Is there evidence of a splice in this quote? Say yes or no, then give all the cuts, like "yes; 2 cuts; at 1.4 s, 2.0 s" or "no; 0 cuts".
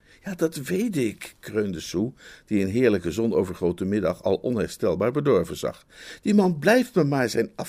no; 0 cuts